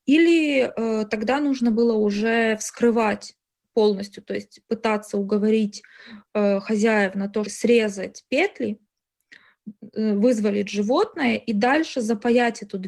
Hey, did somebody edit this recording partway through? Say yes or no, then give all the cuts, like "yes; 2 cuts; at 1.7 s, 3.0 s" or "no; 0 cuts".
yes; 1 cut; at 7.5 s